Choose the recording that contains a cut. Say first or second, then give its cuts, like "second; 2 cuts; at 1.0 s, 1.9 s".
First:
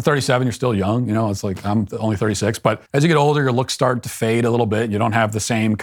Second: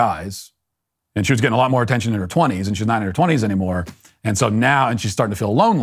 first; 1 cut; at 2.9 s